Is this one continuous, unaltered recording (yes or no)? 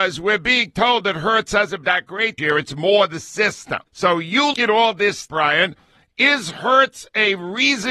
no